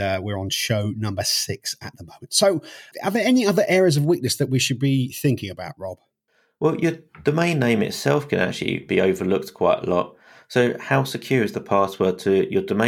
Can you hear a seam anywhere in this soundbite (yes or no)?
no